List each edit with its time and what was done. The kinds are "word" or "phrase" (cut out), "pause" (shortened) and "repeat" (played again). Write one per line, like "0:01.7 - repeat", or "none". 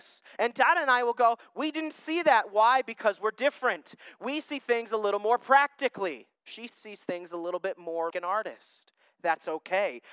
0:06.4 - pause
0:08.1 - word

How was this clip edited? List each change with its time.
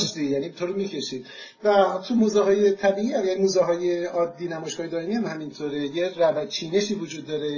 none

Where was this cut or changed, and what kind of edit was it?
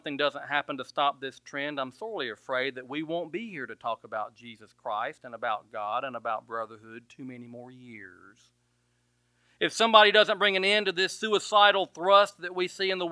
none

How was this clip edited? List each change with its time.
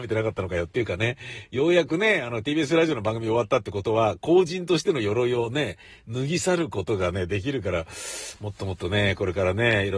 none

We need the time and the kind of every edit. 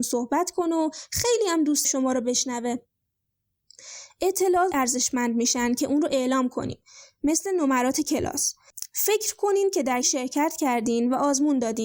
0:01.8 - word
0:04.7 - word
0:10.0 - word

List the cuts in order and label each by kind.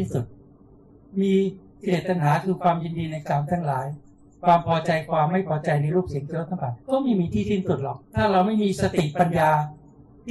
0:06.8 - pause
0:08.0 - pause

